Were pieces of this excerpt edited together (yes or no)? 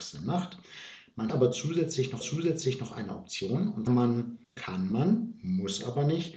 yes